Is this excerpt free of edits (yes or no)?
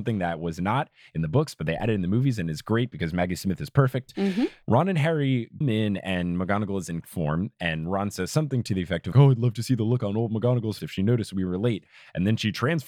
no